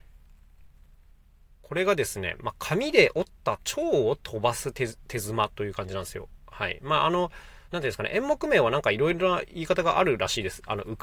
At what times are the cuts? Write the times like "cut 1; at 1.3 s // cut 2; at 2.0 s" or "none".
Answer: cut 1; at 7.7 s

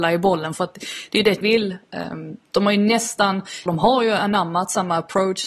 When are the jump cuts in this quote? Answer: cut 1; at 1.4 s // cut 2; at 3.7 s

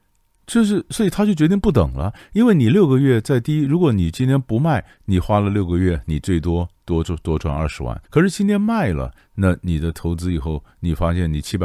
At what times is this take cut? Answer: cut 1; at 8.0 s

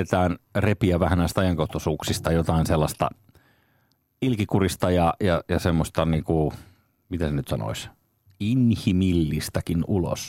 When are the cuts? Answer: none

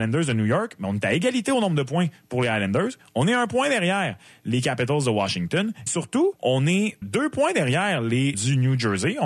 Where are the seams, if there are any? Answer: cut 1; at 5.9 s // cut 2; at 6.4 s // cut 3; at 7.0 s // cut 4; at 8.3 s

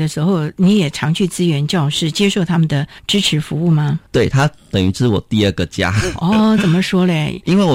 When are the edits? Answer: cut 1; at 4.1 s

